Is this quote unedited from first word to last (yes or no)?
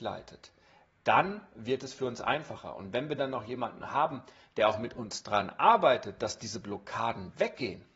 yes